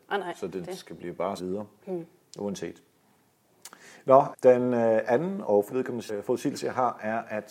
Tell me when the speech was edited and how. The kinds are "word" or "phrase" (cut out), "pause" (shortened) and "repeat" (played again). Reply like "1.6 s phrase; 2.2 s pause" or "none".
1.4 s word; 4.3 s word; 5.7 s word; 6.1 s word